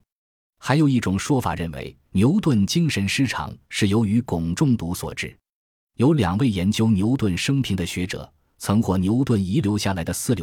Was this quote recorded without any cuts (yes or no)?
no